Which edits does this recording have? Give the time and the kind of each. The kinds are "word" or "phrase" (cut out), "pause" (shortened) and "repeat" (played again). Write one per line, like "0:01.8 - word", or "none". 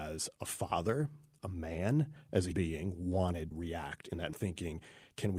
0:01.4 - word
0:02.5 - word
0:03.5 - word
0:04.3 - word